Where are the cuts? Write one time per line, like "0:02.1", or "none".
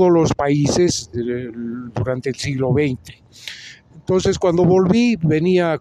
0:01.1